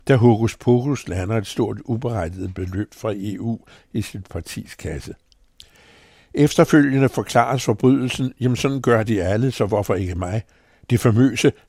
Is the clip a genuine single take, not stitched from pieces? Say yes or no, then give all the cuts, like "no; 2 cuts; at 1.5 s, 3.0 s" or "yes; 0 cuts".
yes; 0 cuts